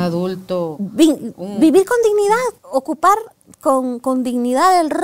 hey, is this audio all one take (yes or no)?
no